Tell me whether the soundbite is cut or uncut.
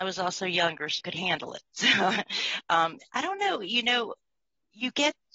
cut